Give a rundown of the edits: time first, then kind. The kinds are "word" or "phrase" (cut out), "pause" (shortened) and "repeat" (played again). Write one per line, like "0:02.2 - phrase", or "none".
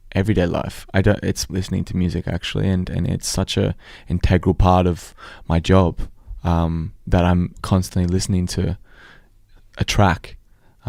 0:01.5 - phrase
0:07.0 - pause